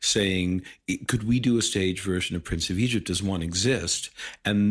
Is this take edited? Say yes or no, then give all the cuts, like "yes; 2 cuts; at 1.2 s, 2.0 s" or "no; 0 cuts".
no; 0 cuts